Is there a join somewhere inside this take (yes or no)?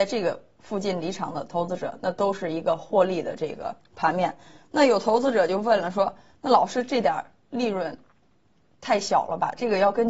yes